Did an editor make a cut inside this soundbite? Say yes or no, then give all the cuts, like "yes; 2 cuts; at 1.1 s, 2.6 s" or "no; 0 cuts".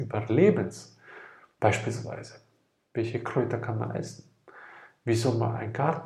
no; 0 cuts